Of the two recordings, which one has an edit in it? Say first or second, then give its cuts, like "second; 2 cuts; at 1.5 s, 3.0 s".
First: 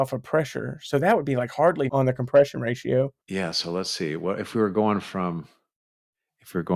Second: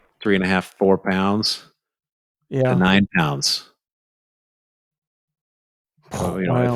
first; 2 cuts; at 1.9 s, 3.2 s